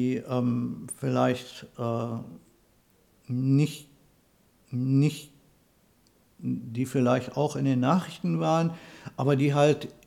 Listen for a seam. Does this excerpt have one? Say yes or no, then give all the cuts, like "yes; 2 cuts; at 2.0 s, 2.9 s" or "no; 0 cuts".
yes; 1 cut; at 4.6 s